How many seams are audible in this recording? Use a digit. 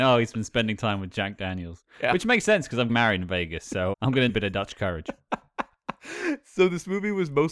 3